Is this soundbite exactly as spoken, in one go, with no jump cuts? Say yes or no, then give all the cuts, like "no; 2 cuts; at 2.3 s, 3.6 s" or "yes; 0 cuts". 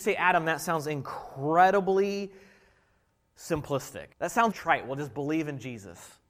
no; 2 cuts; at 4.1 s, 4.5 s